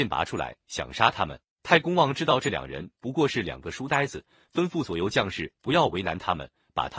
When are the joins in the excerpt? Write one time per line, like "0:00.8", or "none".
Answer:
0:01.5